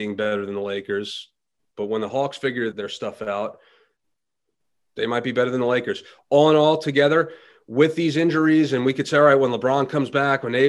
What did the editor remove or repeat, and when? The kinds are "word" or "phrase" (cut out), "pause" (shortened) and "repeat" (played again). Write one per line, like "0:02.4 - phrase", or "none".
0:02.7 - word